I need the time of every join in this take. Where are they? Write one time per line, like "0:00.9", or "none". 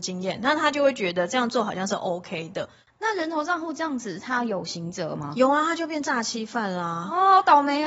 none